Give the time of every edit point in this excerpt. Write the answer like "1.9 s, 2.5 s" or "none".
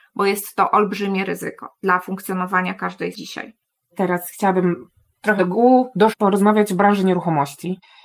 3.1 s, 5.4 s, 6.1 s